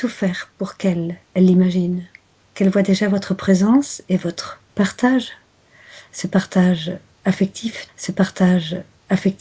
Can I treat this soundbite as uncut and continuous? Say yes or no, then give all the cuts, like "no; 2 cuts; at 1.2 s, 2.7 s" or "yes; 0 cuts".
no; 4 cuts; at 1.2 s, 2.4 s, 4.7 s, 7.9 s